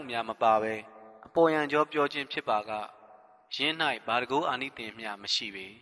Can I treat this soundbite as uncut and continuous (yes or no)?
yes